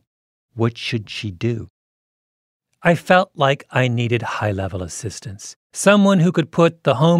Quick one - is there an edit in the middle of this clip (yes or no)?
yes